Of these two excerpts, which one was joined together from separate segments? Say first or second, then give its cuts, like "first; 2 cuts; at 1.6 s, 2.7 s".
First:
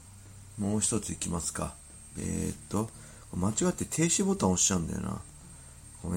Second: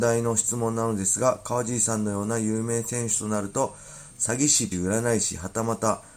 second; 1 cut; at 4.7 s